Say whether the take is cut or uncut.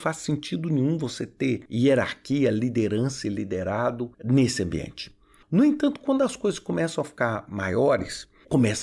uncut